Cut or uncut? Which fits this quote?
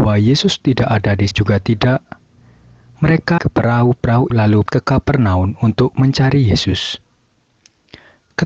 cut